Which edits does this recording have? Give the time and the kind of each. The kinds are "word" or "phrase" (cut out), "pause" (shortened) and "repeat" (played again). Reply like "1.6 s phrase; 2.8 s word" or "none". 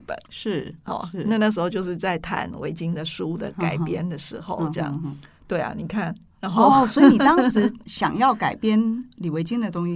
none